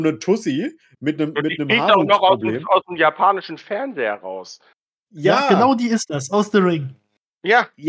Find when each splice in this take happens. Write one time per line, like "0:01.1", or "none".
none